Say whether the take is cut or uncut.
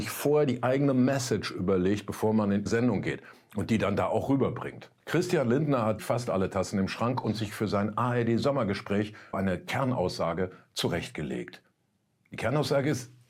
cut